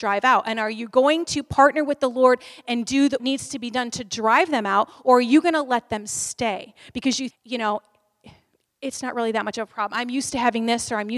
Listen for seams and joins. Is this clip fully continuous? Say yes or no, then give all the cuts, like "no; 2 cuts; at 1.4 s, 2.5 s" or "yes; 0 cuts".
no; 2 cuts; at 3.2 s, 7.3 s